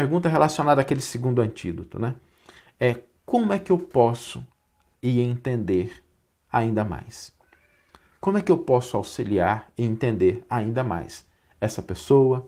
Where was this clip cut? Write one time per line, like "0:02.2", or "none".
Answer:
0:04.9